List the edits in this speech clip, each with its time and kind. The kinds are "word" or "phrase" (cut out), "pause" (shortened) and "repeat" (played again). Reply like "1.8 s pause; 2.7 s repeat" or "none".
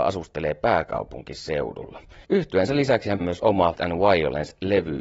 2.2 s pause; 3.2 s word; 3.7 s word

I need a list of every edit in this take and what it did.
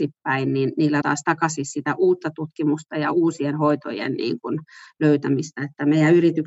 1.0 s word

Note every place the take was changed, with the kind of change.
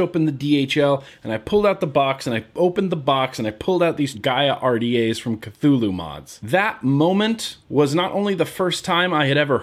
4.1 s word; 7.6 s pause

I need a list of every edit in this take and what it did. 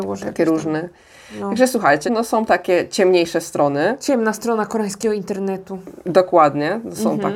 2.1 s word

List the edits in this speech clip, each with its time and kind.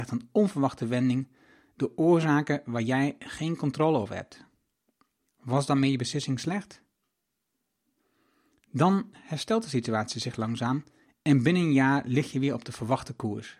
none

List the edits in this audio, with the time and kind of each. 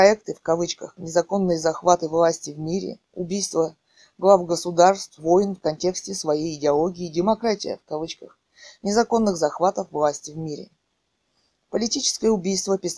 5.2 s word

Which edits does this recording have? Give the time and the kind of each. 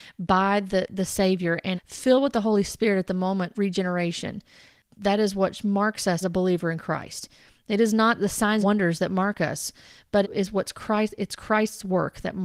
1.7 s word; 3.5 s word; 6.2 s word; 8.2 s word; 8.6 s word; 10.2 s word

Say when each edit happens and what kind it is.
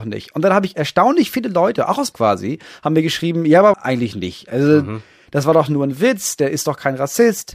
2.1 s phrase; 3.7 s word

